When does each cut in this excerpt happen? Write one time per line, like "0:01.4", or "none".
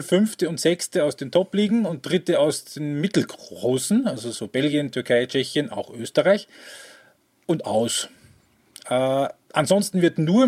none